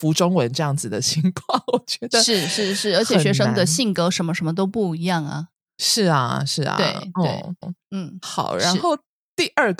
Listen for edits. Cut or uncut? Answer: cut